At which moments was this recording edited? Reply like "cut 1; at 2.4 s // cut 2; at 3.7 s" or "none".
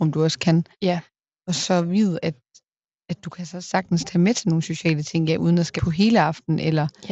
cut 1; at 2.2 s // cut 2; at 5.8 s